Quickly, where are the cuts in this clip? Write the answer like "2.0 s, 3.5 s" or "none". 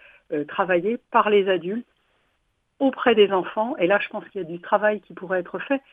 none